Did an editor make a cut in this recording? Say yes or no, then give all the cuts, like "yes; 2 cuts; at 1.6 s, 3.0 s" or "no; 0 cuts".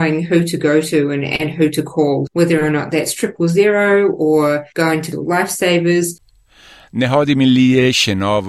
no; 0 cuts